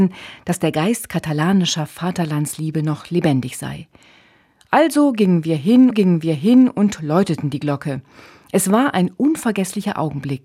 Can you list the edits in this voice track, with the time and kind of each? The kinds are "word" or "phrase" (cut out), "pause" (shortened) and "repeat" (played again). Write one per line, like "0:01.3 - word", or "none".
0:05.9 - repeat

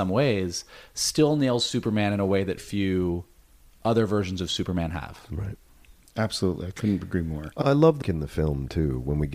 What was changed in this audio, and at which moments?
0:02.6 - word
0:07.6 - word
0:08.0 - word

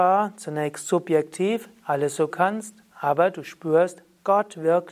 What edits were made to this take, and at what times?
0:02.3 - phrase

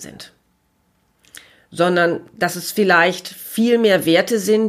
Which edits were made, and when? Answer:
none

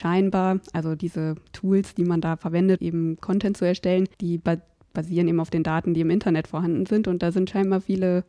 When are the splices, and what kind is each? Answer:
0:02.8 - word
0:04.1 - pause

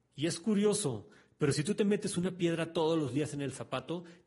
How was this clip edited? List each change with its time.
none

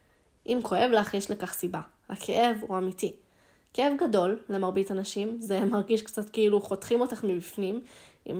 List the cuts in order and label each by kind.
none

